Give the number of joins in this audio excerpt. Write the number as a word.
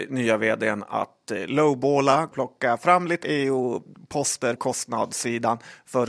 three